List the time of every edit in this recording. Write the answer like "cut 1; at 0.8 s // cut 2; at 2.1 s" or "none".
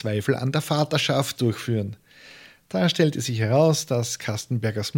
cut 1; at 1.4 s

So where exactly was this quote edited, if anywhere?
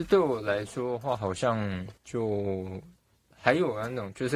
cut 1; at 2.0 s

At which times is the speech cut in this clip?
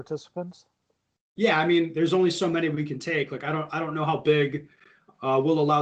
none

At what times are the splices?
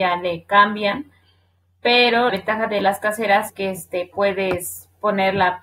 cut 1; at 2.3 s // cut 2; at 3.5 s

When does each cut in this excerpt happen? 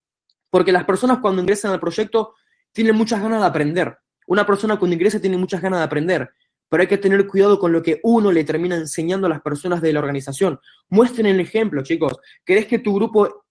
none

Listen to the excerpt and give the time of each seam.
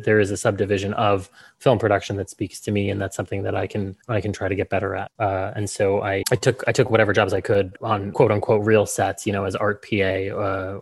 cut 1; at 6.2 s

